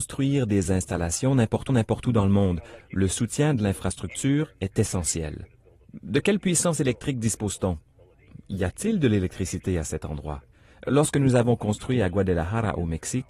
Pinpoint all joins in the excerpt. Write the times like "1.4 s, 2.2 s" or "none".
1.7 s, 10.5 s